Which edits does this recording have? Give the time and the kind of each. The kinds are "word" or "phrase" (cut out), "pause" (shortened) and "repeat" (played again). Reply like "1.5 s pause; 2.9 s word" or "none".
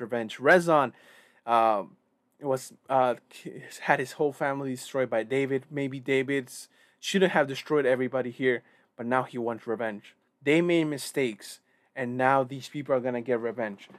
10.3 s pause

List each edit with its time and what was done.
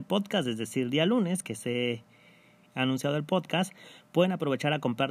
none

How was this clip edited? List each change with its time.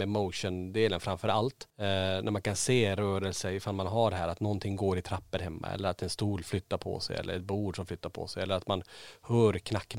none

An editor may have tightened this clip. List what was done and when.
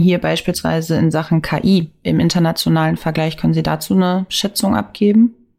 none

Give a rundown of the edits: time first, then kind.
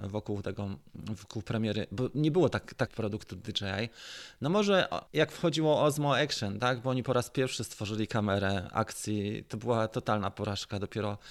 2.9 s phrase; 5.1 s pause

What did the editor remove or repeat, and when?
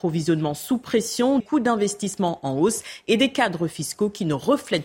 1.4 s word

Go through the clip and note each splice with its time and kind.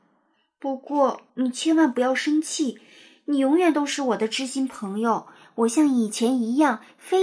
1.3 s pause

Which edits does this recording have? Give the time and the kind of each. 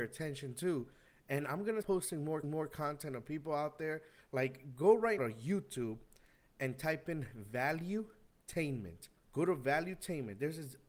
1.8 s word; 2.4 s repeat; 5.2 s word; 9.2 s pause

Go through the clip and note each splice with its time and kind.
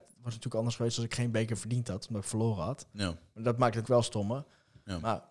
3.8 s word

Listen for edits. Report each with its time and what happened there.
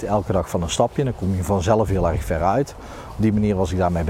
none

